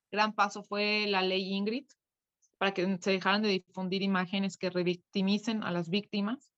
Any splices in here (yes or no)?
no